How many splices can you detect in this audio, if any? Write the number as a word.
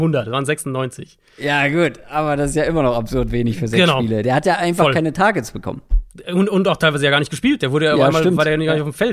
zero